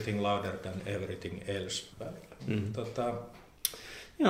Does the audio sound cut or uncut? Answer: cut